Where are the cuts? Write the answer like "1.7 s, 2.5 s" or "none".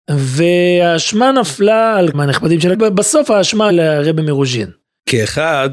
2.1 s, 2.7 s, 3.7 s

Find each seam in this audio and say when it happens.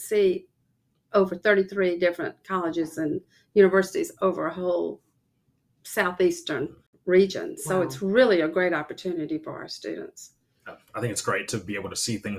none

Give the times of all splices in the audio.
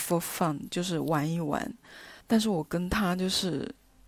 2.2 s

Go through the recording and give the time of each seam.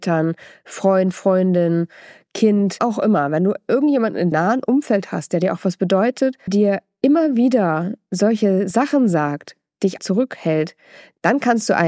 2.8 s, 4.3 s, 6.5 s, 10.0 s

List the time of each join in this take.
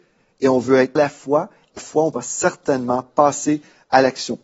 1.0 s, 1.8 s, 2.1 s

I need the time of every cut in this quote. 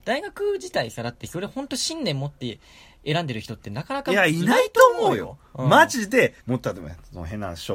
6.4 s

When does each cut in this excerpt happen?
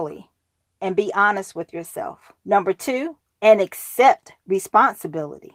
2.4 s, 3.3 s

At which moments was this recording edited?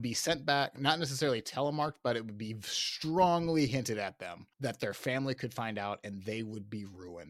4.5 s

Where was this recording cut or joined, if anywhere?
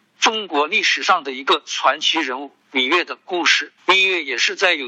3.8 s

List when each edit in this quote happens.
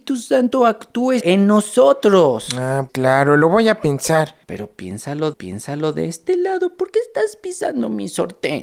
1.2 s, 2.9 s, 4.4 s, 5.3 s

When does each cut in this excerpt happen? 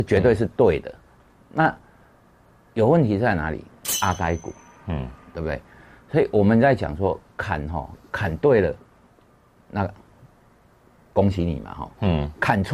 none

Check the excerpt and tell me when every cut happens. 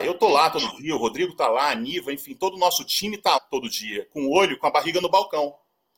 3.4 s

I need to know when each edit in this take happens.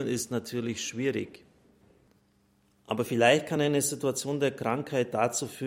none

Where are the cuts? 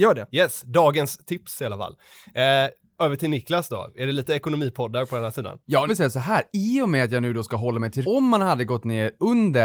5.9 s, 8.0 s

